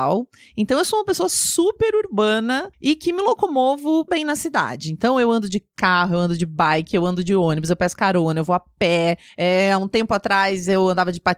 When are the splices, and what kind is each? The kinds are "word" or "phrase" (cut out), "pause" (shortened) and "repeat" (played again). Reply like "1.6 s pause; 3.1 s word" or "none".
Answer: 2.7 s pause; 4.1 s word; 9.3 s pause